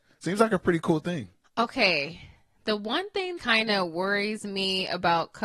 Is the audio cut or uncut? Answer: cut